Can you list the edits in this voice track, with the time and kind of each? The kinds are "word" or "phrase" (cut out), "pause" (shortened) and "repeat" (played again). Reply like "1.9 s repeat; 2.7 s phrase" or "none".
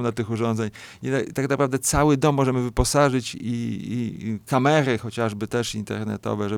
none